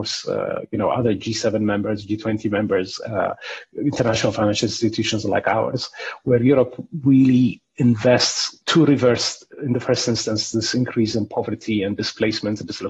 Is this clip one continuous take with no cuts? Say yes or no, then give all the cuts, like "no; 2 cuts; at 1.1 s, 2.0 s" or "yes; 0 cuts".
yes; 0 cuts